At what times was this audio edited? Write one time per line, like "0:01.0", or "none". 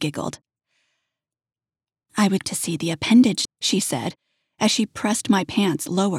0:02.4
0:03.4